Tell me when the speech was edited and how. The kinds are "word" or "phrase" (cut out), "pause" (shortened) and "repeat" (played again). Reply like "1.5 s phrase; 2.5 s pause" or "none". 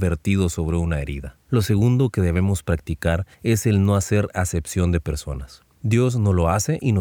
1.4 s pause; 3.3 s pause